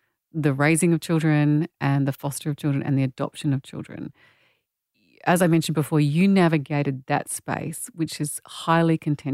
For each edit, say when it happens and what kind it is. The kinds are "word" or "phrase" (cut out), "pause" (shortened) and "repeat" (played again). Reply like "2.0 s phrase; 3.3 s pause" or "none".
none